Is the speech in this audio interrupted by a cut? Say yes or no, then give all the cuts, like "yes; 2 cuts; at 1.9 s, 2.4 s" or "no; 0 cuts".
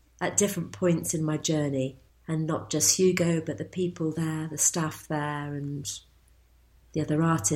yes; 1 cut; at 2.1 s